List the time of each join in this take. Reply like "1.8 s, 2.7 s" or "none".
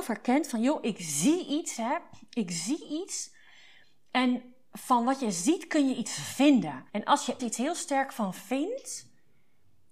6.9 s, 7.4 s